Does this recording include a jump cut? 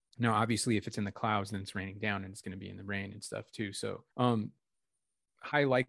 yes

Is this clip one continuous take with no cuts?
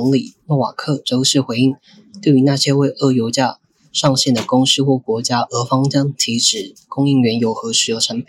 yes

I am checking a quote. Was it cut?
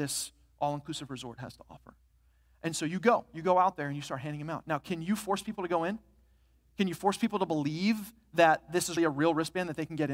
yes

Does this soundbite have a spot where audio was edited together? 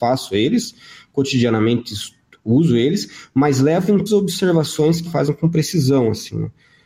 yes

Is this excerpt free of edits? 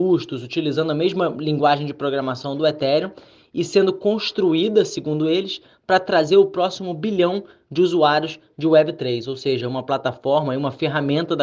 yes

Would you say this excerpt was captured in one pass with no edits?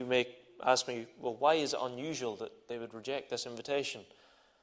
yes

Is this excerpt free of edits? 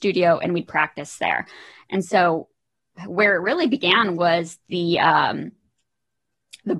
yes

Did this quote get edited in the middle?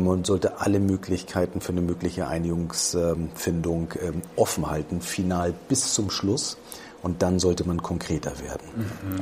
no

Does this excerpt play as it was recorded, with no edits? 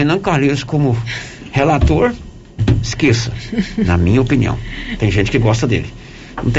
yes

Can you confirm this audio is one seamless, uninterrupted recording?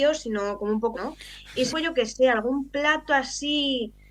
no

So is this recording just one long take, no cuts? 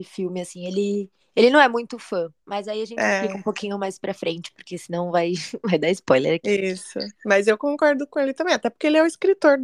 no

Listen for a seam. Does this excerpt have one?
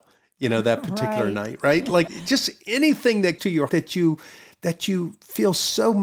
yes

